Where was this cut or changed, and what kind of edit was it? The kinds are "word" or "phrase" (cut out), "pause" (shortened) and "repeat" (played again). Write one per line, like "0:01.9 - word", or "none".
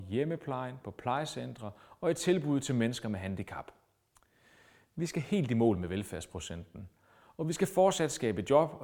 none